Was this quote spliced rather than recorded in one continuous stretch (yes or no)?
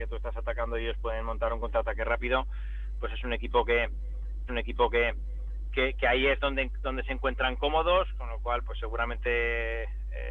yes